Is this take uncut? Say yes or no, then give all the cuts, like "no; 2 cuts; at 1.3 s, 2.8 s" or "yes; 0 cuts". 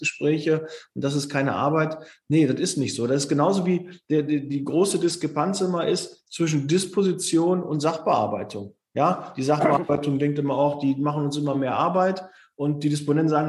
yes; 0 cuts